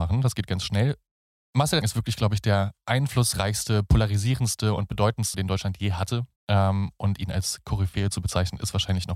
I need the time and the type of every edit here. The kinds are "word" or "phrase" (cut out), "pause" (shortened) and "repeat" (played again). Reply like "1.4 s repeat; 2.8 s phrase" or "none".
1.8 s phrase; 5.3 s word; 6.4 s pause